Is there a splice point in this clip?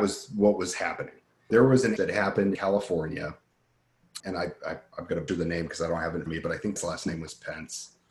yes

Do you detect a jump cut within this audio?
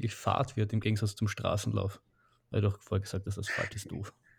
no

